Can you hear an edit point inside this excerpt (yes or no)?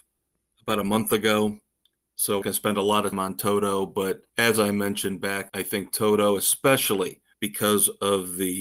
yes